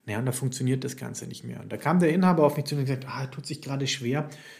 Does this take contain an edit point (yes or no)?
no